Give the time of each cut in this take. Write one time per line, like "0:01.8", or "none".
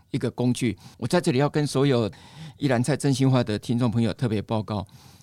0:00.9